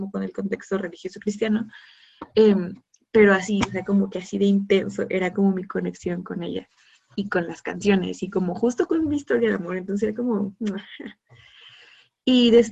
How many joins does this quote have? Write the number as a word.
zero